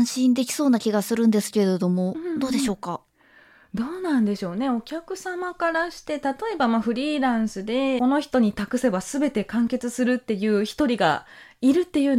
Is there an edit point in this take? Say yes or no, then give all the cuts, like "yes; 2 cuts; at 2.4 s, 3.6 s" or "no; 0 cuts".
yes; 1 cut; at 8.0 s